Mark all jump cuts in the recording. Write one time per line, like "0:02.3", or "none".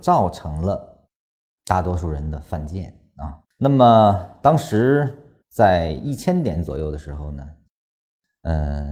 0:01.2
0:03.5
0:05.4